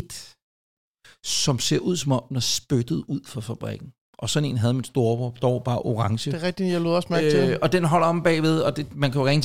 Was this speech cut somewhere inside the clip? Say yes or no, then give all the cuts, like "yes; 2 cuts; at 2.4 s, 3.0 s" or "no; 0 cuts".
no; 0 cuts